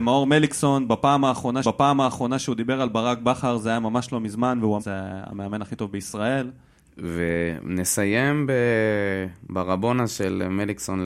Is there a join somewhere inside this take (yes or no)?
yes